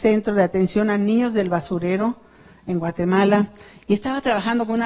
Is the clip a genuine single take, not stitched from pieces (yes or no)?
yes